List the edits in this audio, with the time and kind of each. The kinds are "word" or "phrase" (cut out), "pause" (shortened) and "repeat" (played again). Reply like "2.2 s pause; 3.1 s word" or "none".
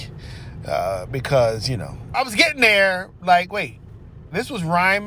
2.1 s word

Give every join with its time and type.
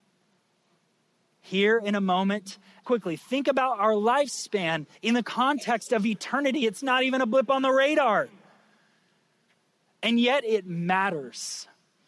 2.8 s phrase; 4.9 s pause

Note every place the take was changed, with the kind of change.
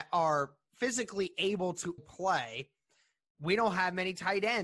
2.0 s word

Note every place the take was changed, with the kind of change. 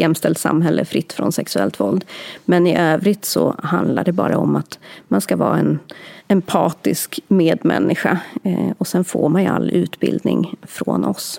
6.2 s pause

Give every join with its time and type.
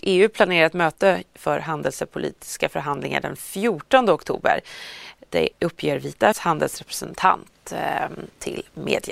5.5 s word; 6.3 s word

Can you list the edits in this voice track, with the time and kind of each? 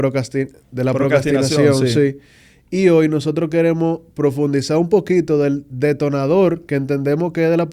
none

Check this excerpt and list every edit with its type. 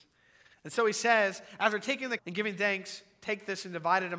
2.2 s word

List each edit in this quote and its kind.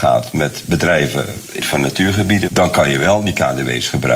1.6 s phrase; 2.5 s word

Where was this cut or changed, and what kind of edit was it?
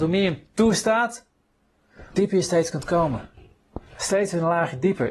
2.1 s word; 3.9 s pause

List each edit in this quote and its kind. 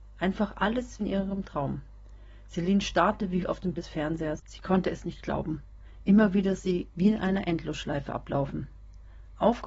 1.0 s word; 3.4 s word; 3.8 s word; 6.6 s word; 6.9 s phrase

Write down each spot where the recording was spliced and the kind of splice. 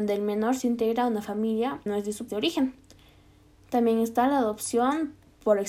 1.9 s word; 2.3 s word

